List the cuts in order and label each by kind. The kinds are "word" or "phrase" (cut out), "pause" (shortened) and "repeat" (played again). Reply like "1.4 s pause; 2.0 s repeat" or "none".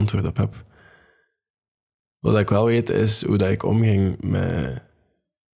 none